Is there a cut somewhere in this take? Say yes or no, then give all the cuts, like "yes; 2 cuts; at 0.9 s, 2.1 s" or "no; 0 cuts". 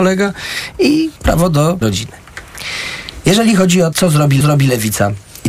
yes; 4 cuts; at 1.2 s, 1.8 s, 3.9 s, 4.4 s